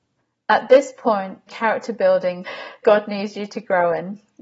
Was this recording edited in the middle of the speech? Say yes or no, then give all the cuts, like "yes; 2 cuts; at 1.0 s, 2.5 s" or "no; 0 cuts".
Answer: yes; 3 cuts; at 1.5 s, 2.4 s, 2.8 s